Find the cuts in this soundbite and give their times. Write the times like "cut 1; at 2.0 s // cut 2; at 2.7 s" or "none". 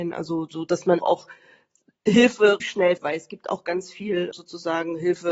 cut 1; at 1.0 s // cut 2; at 2.6 s // cut 3; at 3.0 s // cut 4; at 4.3 s